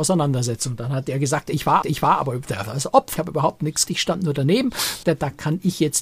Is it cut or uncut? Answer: cut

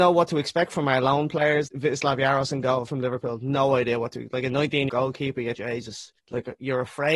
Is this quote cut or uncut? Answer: cut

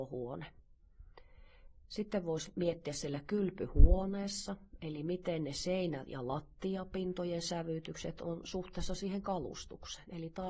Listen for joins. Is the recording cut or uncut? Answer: uncut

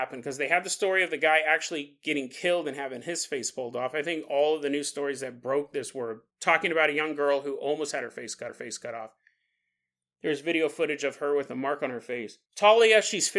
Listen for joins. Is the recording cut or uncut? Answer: cut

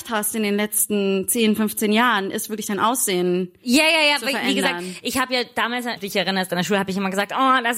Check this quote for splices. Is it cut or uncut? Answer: cut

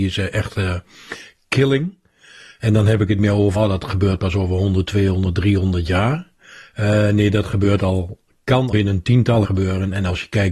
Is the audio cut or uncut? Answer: cut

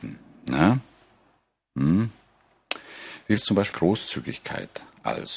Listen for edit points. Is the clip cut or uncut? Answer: cut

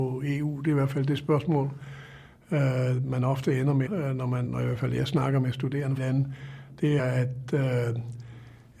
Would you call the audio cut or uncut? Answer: cut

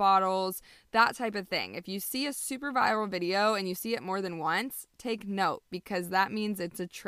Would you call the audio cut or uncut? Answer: uncut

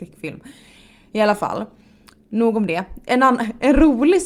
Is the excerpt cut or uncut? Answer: uncut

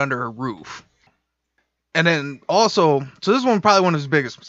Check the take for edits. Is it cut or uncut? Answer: uncut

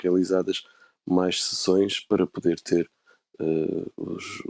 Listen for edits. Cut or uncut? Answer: uncut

